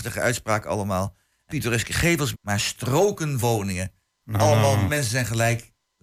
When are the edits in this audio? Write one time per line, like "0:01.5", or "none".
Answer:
0:01.5
0:02.3
0:03.4
0:04.9